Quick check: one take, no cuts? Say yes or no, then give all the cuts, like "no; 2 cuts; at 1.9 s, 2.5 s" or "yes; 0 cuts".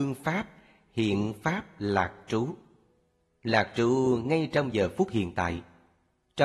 yes; 0 cuts